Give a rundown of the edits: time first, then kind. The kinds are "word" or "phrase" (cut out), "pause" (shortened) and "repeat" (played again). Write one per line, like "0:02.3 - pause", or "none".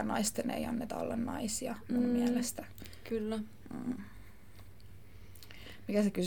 none